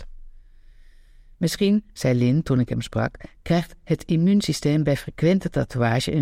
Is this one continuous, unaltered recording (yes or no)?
yes